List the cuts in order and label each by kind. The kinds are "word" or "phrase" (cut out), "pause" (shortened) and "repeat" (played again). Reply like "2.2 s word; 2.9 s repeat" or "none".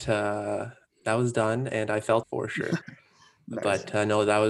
2.2 s phrase; 3.0 s pause